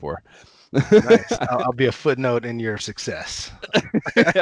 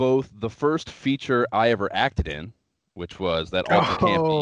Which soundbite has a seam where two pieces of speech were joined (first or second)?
first